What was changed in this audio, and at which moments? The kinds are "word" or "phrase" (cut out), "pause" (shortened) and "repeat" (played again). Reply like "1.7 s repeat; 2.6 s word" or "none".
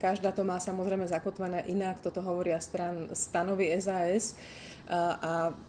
none